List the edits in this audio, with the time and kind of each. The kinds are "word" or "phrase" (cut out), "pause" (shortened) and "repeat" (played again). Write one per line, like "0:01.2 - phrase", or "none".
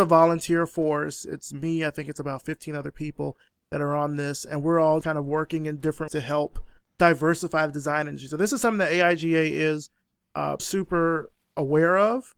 0:05.0 - word
0:06.1 - word
0:06.9 - word
0:10.6 - word